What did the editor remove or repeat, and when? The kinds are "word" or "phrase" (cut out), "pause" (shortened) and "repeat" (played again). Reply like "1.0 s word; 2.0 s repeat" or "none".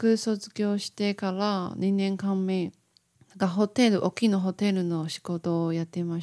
3.1 s pause